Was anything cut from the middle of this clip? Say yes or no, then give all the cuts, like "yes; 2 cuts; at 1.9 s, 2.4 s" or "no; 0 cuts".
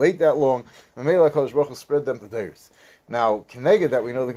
yes; 1 cut; at 2.2 s